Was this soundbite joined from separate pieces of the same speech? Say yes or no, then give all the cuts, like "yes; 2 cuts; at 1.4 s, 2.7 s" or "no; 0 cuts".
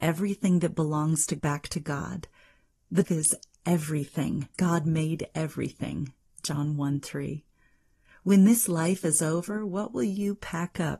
yes; 3 cuts; at 1.4 s, 3.0 s, 4.5 s